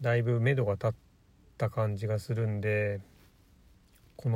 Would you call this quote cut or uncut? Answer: uncut